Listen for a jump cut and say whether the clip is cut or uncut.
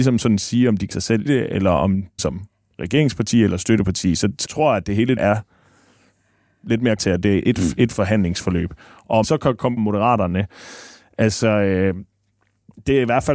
cut